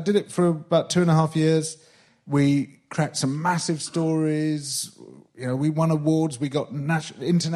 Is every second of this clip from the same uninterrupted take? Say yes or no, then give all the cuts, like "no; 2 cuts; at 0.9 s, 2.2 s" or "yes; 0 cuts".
yes; 0 cuts